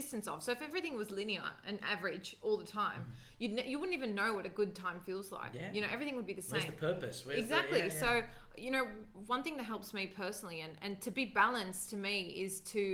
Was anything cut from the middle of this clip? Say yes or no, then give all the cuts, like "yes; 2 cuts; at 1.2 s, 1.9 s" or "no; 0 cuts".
no; 0 cuts